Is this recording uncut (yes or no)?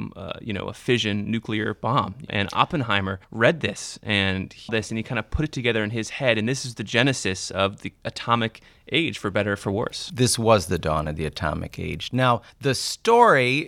no